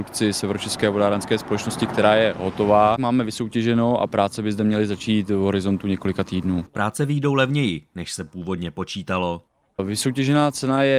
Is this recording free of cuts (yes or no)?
yes